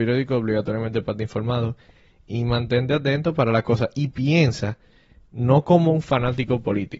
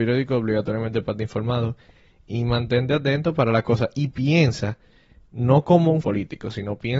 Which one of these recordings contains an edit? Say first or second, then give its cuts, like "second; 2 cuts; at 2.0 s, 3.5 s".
second; 1 cut; at 6.0 s